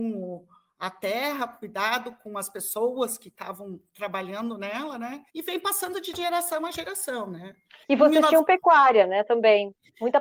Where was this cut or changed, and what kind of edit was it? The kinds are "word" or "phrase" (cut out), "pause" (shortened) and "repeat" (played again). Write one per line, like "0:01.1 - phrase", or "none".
0:05.3 - pause
0:07.8 - pause

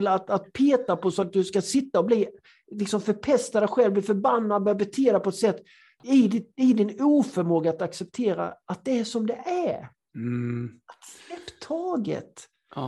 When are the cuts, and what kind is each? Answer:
none

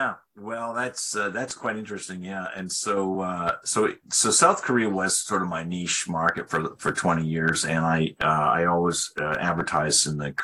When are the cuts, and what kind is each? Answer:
none

